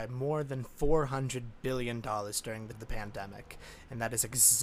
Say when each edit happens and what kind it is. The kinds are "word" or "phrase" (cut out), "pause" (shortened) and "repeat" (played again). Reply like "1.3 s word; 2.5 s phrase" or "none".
2.7 s word